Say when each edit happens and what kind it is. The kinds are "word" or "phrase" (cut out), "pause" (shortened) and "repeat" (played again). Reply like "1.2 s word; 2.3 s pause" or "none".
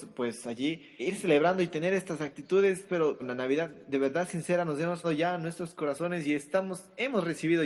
1.0 s word; 2.9 s word; 3.2 s phrase; 5.0 s word